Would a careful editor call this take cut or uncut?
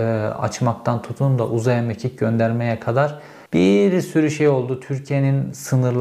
cut